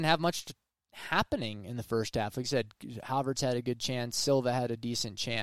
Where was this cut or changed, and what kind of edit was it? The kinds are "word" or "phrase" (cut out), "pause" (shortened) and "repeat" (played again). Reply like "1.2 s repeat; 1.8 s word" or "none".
none